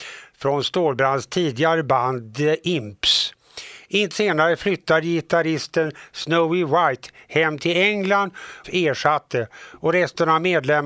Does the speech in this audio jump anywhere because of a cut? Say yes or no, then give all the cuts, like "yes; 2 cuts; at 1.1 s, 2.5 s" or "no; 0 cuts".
yes; 2 cuts; at 4.1 s, 8.6 s